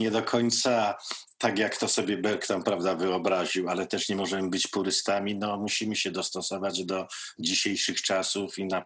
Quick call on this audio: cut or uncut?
uncut